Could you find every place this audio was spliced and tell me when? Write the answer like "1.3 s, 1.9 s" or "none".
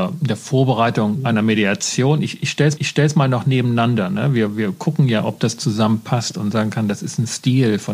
2.8 s